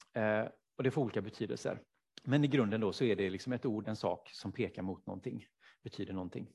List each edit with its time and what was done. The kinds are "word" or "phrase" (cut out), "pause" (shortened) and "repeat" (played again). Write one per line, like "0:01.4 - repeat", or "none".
0:01.9 - pause
0:03.8 - word